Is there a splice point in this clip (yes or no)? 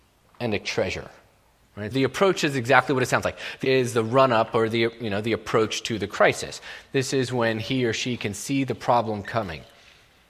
yes